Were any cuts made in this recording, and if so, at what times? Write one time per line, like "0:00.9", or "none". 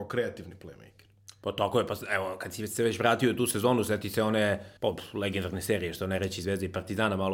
0:04.8